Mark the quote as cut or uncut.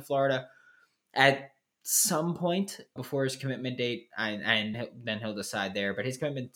cut